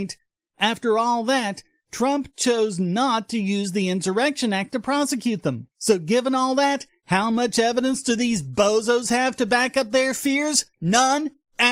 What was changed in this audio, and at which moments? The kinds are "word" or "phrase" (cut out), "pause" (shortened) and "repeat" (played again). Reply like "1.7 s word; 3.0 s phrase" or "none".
5.7 s pause; 10.7 s pause